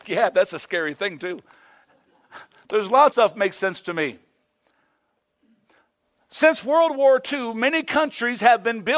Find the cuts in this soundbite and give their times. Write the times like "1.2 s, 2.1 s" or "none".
3.1 s